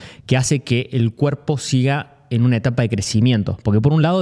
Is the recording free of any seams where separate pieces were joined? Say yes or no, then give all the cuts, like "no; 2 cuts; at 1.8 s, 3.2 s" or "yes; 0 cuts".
yes; 0 cuts